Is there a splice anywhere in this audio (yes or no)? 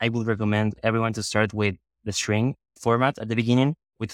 no